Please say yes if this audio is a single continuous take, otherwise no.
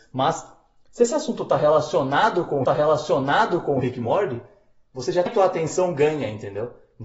no